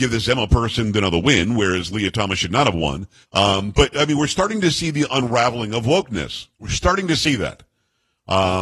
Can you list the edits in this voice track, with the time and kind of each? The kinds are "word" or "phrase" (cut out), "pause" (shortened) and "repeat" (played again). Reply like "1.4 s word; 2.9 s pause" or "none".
3.2 s pause; 6.5 s pause